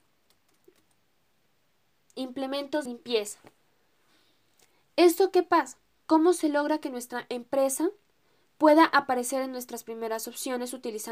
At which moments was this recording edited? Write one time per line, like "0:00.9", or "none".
0:02.9